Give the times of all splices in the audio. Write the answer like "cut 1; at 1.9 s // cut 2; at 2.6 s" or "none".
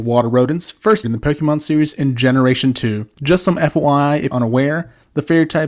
cut 1; at 1.0 s // cut 2; at 3.1 s // cut 3; at 4.3 s